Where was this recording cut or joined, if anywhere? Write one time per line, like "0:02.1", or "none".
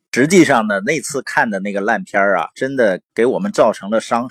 0:03.1